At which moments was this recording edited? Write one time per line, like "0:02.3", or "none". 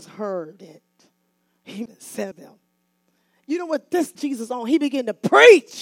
0:01.9
0:02.3
0:04.2